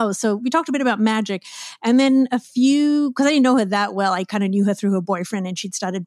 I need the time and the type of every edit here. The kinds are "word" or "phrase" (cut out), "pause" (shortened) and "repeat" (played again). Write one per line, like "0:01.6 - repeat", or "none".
none